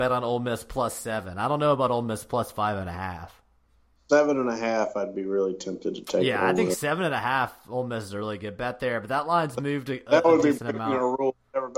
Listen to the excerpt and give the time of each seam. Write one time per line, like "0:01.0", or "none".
none